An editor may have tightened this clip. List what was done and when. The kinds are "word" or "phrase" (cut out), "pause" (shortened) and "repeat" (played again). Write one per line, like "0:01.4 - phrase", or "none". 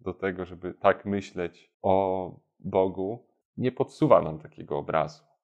0:01.7 - pause
0:03.4 - pause